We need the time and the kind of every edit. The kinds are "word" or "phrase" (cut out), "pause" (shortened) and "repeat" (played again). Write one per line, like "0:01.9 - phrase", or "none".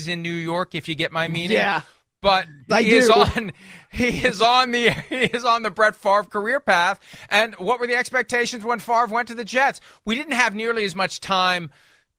0:02.7 - word